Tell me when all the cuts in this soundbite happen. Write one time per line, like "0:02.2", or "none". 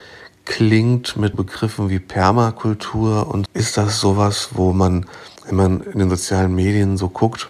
0:01.3
0:03.5
0:05.4